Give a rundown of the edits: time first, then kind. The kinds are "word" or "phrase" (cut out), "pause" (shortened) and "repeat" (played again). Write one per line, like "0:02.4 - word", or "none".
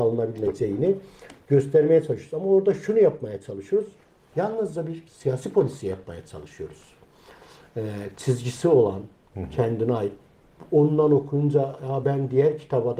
none